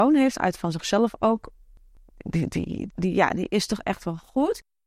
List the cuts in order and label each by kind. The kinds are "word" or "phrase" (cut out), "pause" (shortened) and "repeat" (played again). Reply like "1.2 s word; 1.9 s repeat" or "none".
2.9 s word